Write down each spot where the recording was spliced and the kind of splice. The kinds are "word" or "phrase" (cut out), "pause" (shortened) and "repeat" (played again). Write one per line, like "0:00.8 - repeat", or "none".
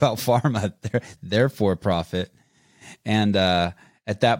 0:01.2 - word